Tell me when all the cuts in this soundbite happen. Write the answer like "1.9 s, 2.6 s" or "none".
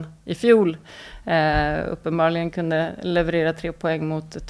none